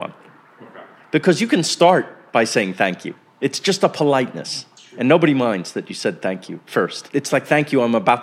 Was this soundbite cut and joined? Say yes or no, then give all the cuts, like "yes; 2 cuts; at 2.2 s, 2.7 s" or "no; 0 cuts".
no; 0 cuts